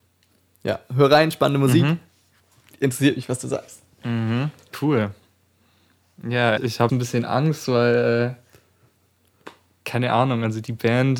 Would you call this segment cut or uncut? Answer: cut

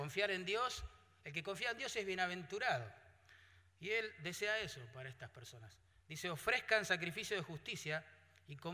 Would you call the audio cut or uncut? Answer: uncut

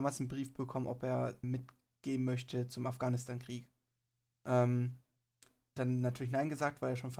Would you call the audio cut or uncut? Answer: cut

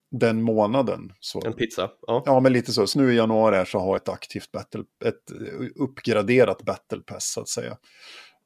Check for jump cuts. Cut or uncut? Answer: cut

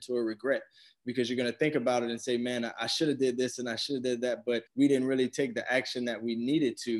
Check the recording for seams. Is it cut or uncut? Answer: cut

